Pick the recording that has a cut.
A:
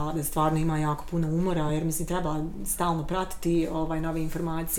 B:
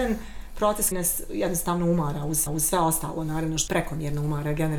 B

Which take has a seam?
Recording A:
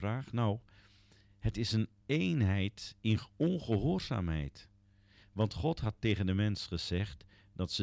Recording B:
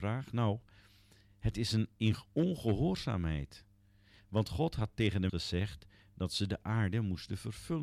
B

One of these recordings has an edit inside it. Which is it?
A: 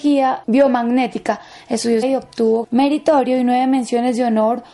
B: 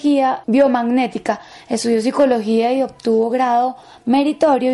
A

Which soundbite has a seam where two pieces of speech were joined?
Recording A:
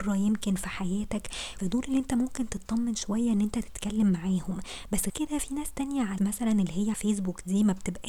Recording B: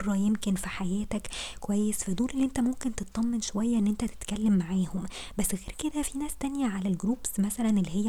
A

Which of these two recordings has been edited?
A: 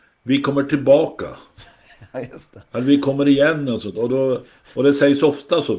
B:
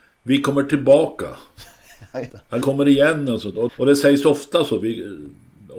B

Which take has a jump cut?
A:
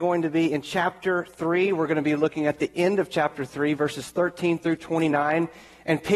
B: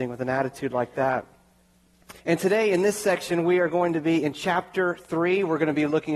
B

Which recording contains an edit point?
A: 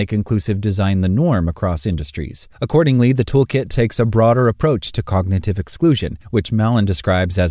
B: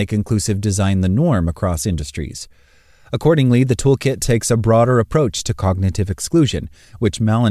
A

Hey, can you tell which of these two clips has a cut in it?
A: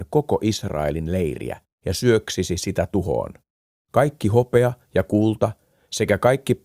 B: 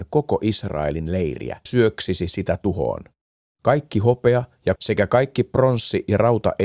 B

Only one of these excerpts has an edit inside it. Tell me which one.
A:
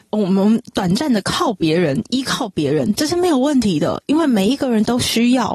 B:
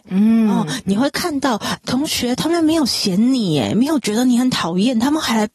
B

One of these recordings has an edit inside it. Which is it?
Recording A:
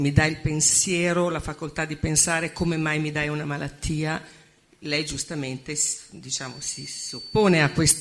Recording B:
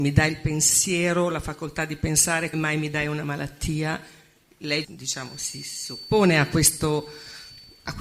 B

